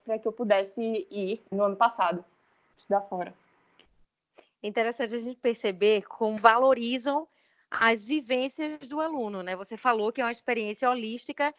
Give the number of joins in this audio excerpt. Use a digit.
2